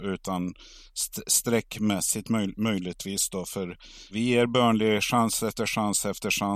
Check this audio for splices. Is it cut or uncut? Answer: cut